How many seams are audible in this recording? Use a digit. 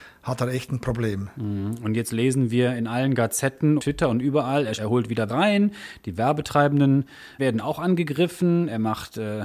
4